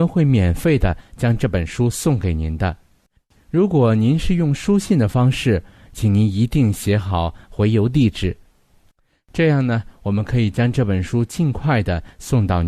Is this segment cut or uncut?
uncut